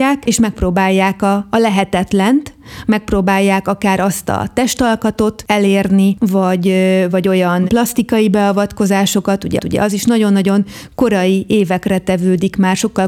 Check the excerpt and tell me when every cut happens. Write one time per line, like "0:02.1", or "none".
0:09.6